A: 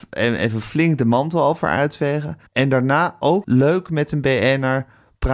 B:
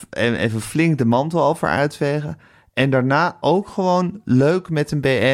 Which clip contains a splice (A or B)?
A